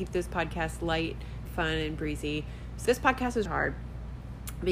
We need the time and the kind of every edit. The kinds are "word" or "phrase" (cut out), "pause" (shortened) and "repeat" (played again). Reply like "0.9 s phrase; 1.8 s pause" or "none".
1.5 s word; 2.9 s word; 3.5 s word

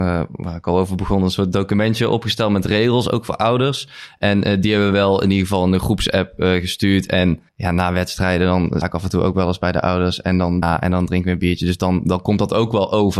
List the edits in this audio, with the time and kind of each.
7.5 s pause; 8.8 s word; 10.6 s phrase

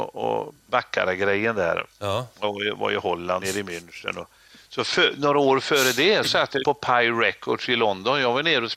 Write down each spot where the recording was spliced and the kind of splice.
3.4 s word; 6.2 s word; 6.6 s word

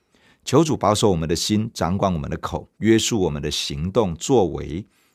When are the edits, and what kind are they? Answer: 2.7 s pause

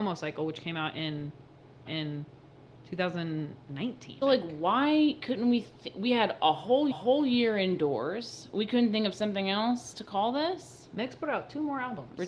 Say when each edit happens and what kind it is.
1.9 s repeat; 4.2 s word; 6.9 s repeat

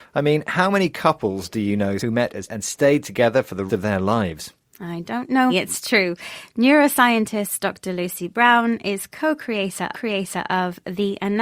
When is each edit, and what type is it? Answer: 2.0 s word; 2.5 s word; 3.7 s word; 5.5 s word; 9.9 s repeat

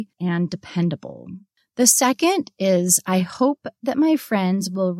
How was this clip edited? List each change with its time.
none

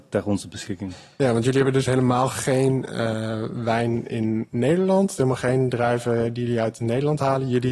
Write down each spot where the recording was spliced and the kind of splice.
none

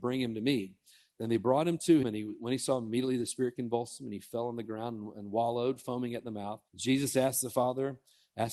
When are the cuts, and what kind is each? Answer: 2.0 s word; 5.1 s word; 6.7 s pause

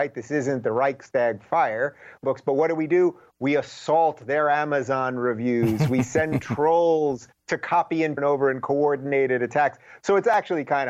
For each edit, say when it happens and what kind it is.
2.2 s phrase; 7.4 s pause; 8.2 s phrase

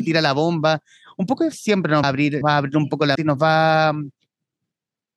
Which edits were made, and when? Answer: 1.5 s word; 2.0 s word; 2.4 s word; 3.2 s word

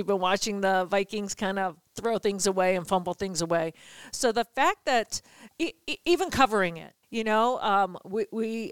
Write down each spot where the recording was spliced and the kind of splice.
7.0 s pause

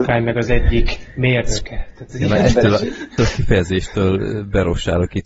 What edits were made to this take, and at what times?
3.2 s word

